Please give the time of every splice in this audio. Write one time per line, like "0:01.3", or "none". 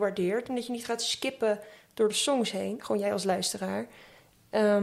none